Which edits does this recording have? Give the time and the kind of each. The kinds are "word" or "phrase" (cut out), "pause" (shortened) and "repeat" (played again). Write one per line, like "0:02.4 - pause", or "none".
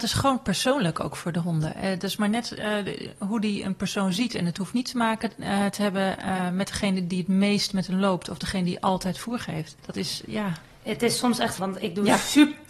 0:09.8 - pause
0:11.6 - word